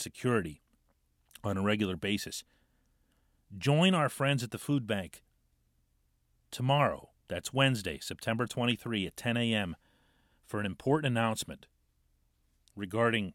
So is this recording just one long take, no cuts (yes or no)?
yes